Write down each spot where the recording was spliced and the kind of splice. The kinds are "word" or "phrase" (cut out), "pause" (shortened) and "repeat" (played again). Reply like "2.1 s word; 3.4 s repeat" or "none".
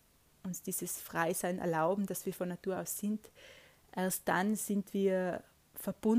none